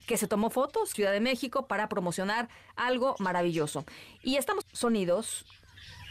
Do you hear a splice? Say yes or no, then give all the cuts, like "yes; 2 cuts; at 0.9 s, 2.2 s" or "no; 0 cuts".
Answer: yes; 2 cuts; at 0.9 s, 4.6 s